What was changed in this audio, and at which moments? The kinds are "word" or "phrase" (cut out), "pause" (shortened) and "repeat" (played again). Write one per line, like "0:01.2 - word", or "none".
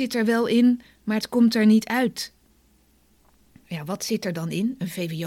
none